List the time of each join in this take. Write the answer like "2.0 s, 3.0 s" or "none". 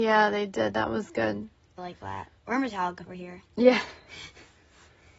1.8 s, 2.4 s, 3.1 s